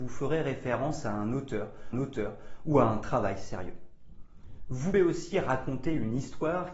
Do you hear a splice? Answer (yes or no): yes